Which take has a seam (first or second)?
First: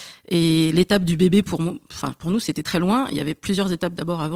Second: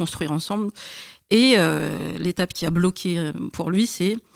first